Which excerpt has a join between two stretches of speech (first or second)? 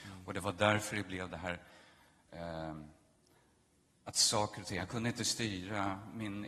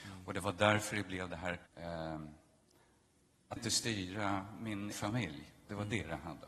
second